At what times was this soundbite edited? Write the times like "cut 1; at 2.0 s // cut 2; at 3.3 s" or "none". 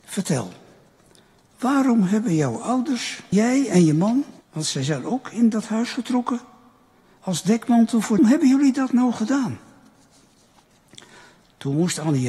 cut 1; at 3.3 s // cut 2; at 4.4 s // cut 3; at 8.2 s